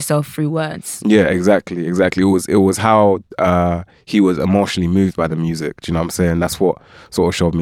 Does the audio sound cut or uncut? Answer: uncut